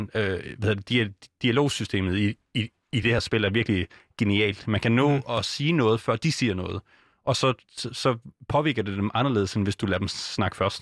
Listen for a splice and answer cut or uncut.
uncut